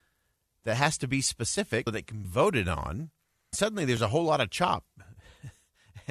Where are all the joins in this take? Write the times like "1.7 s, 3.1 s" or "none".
1.9 s, 2.2 s, 3.5 s